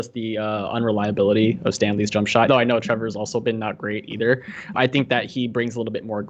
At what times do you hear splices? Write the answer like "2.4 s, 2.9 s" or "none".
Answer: 2.5 s, 4.7 s